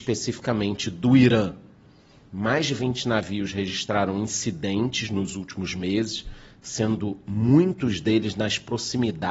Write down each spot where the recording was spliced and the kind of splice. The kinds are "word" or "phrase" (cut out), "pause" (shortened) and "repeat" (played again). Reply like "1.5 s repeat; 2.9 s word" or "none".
none